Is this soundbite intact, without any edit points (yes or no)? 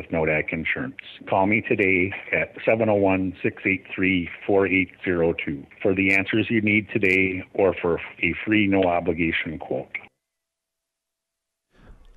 yes